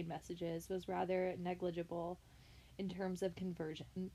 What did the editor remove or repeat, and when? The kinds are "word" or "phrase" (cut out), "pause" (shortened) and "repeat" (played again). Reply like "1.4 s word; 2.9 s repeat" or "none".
none